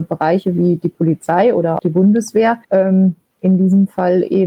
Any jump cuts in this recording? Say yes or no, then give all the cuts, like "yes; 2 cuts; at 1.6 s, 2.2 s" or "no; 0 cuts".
yes; 2 cuts; at 1.8 s, 2.6 s